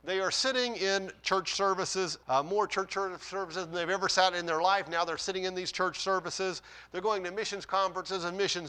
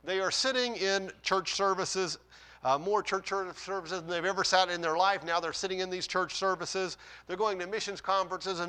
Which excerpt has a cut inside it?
first; 1 cut; at 2.2 s

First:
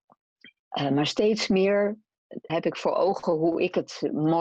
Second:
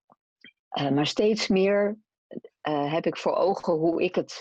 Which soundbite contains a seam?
first; 1 cut; at 2.5 s

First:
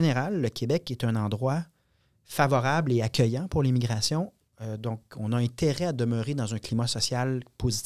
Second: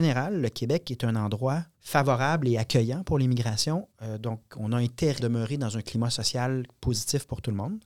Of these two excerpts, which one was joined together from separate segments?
second; 3 cuts; at 1.7 s, 3.9 s, 5.2 s

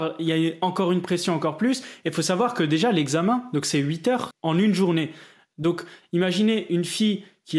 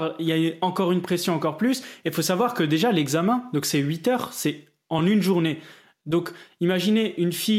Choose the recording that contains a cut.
first; 1 cut; at 4.3 s

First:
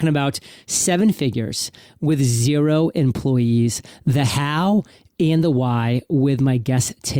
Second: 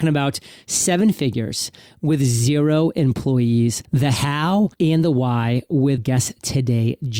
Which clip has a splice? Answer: second; 3 cuts; at 3.9 s, 4.7 s, 6.0 s

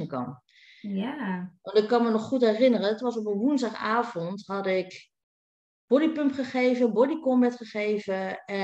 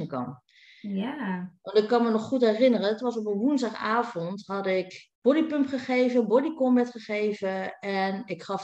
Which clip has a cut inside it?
second; 1 cut; at 5.1 s

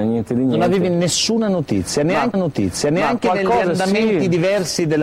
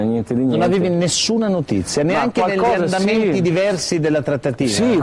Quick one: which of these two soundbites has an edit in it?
first; 1 cut; at 2.3 s

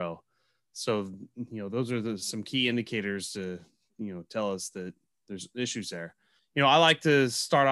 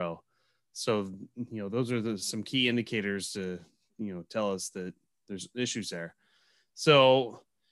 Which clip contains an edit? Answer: first; 1 cut; at 6.4 s

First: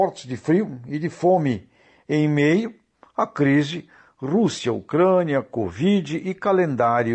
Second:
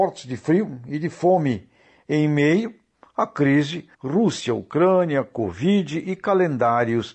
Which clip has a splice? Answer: second; 1 cut; at 3.9 s

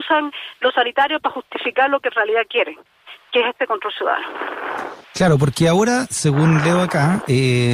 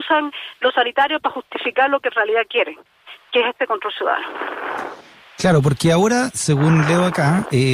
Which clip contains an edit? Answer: first; 1 cut; at 5.0 s

